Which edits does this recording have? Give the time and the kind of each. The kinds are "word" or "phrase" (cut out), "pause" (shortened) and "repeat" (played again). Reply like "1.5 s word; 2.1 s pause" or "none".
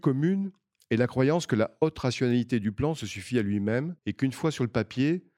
4.0 s pause